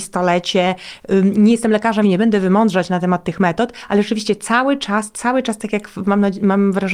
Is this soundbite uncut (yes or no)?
no